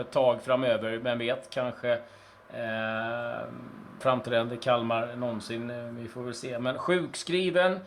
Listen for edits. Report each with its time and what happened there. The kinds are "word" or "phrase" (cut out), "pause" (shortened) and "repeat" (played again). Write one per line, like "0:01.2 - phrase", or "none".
0:04.0 - word